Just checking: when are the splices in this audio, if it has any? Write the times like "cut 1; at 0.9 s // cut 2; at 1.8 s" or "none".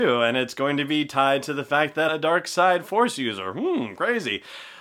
cut 1; at 2.1 s